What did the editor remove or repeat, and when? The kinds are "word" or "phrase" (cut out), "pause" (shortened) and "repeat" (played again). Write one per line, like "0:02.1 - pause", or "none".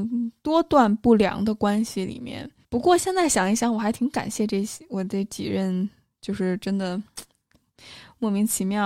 0:02.6 - pause